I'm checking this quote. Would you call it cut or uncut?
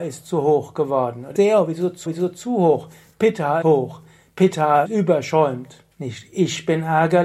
cut